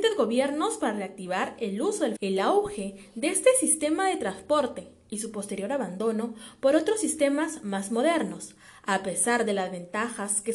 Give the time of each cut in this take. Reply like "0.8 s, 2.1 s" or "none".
2.2 s